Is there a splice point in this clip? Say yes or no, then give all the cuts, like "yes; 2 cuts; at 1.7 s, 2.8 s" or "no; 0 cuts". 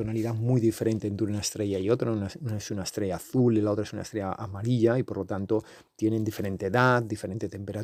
no; 0 cuts